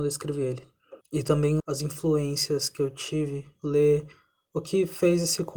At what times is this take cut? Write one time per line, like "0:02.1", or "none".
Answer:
0:01.0
0:01.6